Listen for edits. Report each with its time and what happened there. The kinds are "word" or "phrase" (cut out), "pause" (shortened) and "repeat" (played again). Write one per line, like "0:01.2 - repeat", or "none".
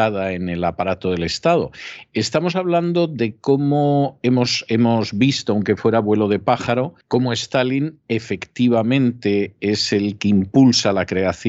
0:07.0 - pause